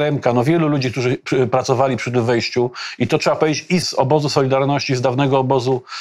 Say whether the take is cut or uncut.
cut